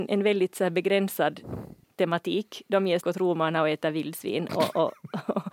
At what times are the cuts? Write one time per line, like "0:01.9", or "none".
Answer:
0:01.8
0:03.0